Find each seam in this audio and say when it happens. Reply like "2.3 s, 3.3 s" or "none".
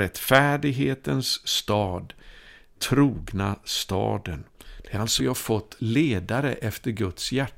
2.8 s, 5.2 s